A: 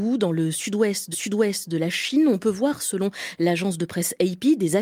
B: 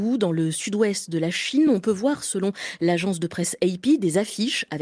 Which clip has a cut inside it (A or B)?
A